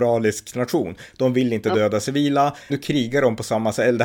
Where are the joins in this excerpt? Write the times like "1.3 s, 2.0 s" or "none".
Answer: 2.7 s